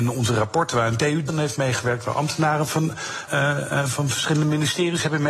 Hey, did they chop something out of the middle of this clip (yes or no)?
yes